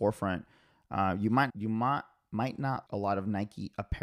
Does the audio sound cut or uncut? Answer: cut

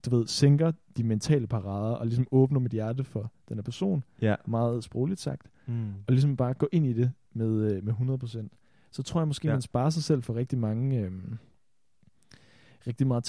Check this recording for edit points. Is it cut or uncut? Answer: uncut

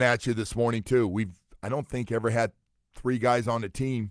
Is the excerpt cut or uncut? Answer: uncut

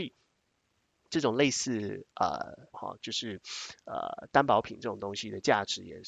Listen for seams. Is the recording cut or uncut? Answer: cut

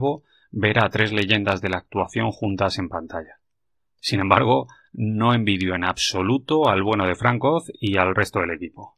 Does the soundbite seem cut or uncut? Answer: uncut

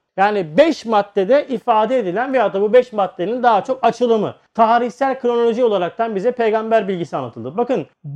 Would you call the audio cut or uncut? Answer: uncut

